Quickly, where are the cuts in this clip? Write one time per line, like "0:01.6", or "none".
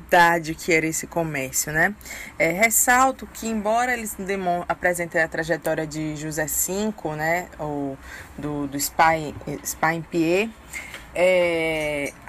none